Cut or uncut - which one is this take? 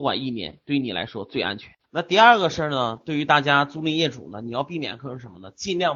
cut